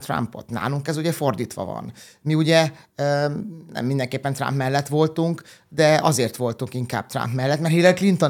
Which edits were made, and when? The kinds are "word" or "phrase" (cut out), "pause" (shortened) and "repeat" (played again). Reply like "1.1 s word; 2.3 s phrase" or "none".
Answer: none